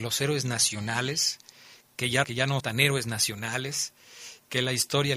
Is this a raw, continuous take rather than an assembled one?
no; 2 cuts; at 2.2 s, 2.6 s

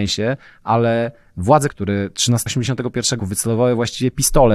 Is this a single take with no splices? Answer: no; 3 cuts; at 1.7 s, 2.5 s, 3.2 s

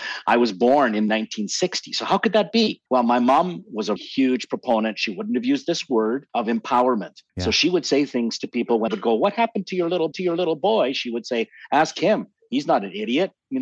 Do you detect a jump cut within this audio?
yes; 6 cuts; at 2.9 s, 4.0 s, 6.3 s, 7.3 s, 8.9 s, 10.1 s

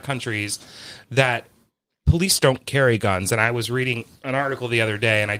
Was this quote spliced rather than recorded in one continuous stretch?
no; 0 cuts

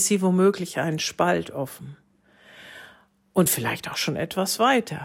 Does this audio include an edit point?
no; 0 cuts

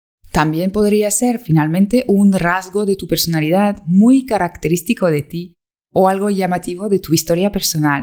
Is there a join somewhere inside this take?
no; 0 cuts

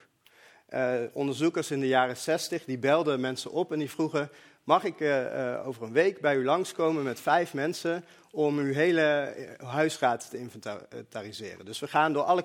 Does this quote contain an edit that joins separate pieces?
no; 0 cuts

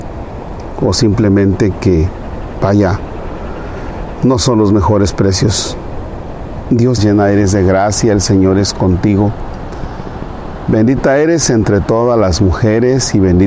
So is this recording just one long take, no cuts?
no; 1 cut; at 7.0 s

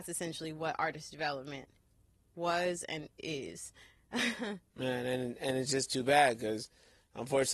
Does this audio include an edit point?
yes; 1 cut; at 4.7 s

